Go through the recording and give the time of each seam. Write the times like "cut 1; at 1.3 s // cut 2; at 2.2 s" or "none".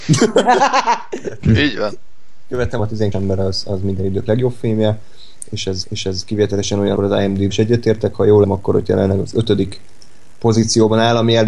cut 1; at 2.8 s // cut 2; at 3.1 s // cut 3; at 4.3 s // cut 4; at 5.8 s // cut 5; at 7.0 s // cut 6; at 7.5 s // cut 7; at 8.4 s